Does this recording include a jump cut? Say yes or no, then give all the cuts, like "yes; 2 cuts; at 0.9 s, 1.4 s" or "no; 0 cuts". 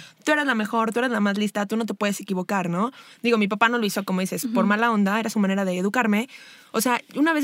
no; 0 cuts